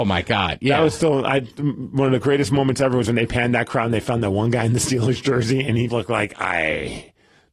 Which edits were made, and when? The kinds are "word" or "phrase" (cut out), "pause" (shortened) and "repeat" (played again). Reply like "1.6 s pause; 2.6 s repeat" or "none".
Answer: 5.9 s word